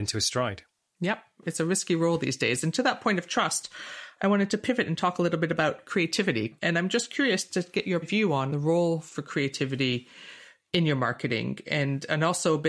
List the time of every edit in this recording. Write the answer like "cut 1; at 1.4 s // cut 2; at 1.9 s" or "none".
cut 1; at 8.0 s